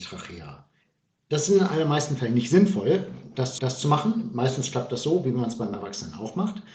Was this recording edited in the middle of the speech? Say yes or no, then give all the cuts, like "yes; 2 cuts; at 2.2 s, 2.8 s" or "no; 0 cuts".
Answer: yes; 1 cut; at 3.6 s